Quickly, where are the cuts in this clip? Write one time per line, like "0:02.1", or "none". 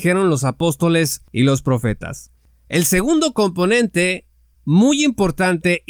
none